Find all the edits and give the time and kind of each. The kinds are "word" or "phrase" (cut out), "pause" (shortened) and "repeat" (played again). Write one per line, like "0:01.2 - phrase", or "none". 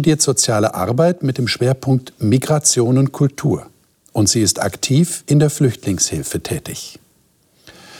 none